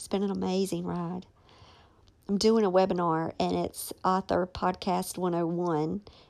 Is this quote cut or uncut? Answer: uncut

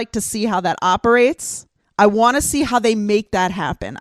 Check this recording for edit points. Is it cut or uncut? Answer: cut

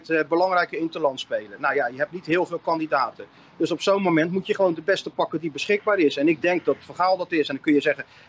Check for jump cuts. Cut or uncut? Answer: uncut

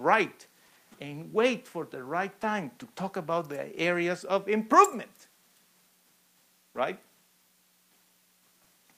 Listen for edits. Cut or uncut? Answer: uncut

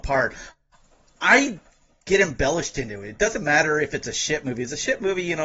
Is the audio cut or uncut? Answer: uncut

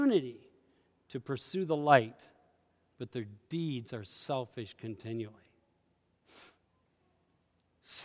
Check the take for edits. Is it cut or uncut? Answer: uncut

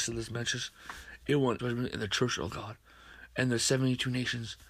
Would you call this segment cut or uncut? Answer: cut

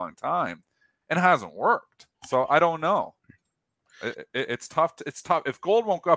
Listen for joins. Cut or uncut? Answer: cut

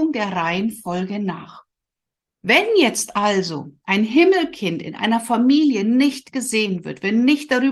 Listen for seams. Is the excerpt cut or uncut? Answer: uncut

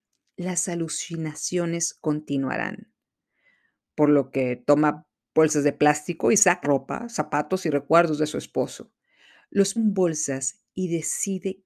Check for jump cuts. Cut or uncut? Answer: cut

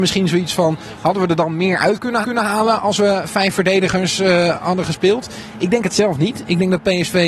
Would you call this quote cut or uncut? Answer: cut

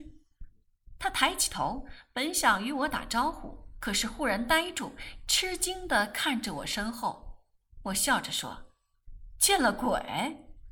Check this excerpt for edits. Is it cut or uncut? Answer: uncut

